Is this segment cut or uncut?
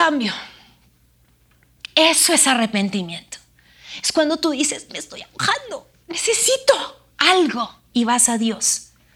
uncut